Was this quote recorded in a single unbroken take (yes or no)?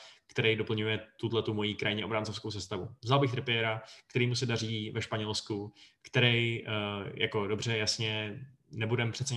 yes